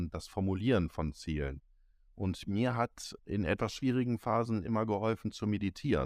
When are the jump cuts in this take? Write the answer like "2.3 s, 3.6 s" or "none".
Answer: none